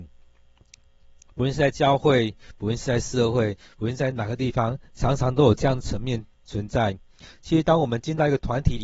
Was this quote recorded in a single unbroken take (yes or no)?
no